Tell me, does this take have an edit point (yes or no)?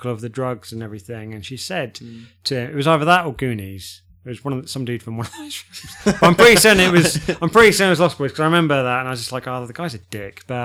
no